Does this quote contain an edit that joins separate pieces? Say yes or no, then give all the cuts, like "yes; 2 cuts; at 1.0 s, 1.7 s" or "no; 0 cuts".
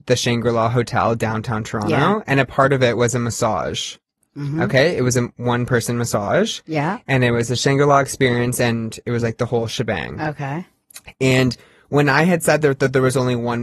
no; 0 cuts